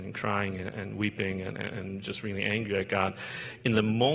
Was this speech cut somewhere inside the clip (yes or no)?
no